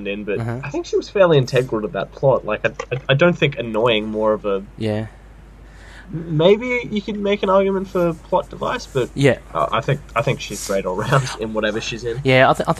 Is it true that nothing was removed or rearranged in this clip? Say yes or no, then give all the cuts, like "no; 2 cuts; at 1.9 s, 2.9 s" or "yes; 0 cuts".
yes; 0 cuts